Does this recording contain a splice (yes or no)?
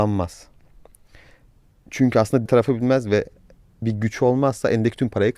yes